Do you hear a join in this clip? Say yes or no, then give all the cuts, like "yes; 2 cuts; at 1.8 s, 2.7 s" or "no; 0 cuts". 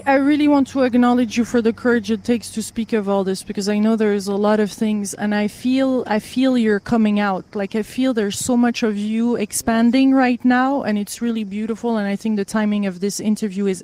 no; 0 cuts